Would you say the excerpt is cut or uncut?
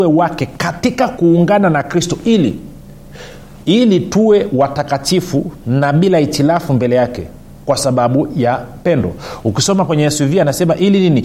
uncut